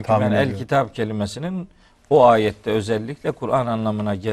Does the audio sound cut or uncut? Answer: uncut